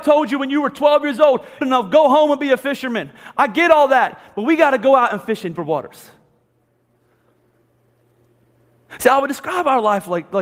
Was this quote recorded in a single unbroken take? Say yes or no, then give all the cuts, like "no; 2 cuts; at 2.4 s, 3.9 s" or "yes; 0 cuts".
no; 2 cuts; at 1.6 s, 5.5 s